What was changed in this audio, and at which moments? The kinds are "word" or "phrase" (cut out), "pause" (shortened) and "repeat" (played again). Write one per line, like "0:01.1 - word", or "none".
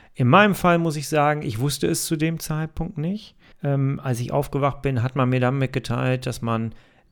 0:03.5 - pause